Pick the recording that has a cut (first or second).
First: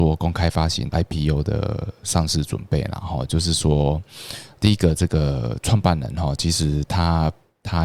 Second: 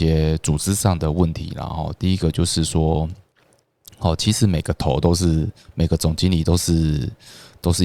first